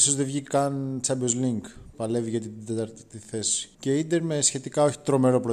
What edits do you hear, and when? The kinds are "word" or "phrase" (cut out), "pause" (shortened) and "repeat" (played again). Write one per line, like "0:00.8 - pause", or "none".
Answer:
0:03.7 - pause